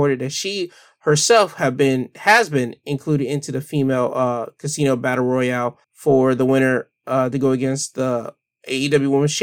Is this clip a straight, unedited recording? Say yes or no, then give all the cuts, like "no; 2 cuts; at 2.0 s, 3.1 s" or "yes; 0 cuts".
no; 1 cut; at 5.8 s